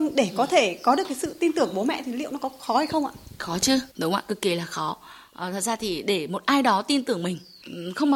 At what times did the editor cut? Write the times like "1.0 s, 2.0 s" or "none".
3.9 s

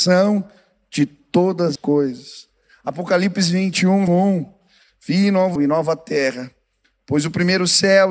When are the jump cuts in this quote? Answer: 1.8 s, 4.1 s, 5.6 s

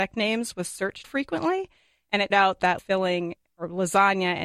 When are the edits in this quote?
1.0 s, 2.3 s, 2.8 s

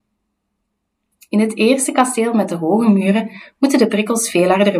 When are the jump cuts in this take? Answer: none

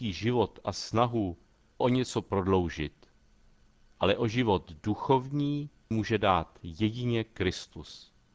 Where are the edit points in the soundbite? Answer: 1.8 s, 5.9 s

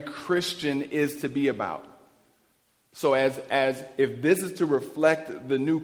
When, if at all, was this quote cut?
none

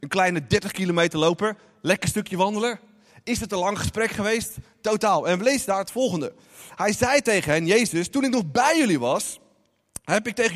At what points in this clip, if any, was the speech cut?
none

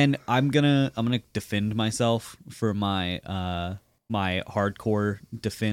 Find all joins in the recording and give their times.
4.0 s

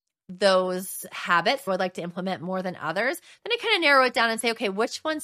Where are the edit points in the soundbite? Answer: 1.7 s

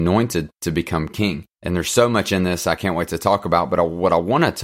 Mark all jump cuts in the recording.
1.5 s

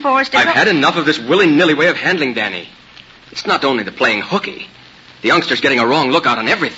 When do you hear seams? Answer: none

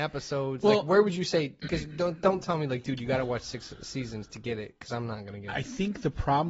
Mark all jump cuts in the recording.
none

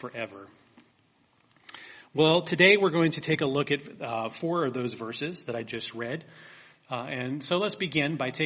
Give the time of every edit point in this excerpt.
none

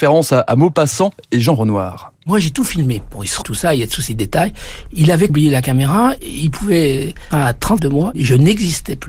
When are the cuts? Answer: 3.4 s, 4.1 s, 5.3 s, 7.3 s, 7.8 s

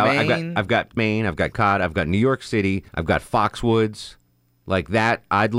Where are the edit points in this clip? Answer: 1.0 s, 1.5 s, 2.9 s, 4.3 s

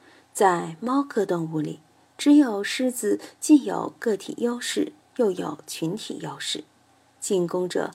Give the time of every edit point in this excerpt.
none

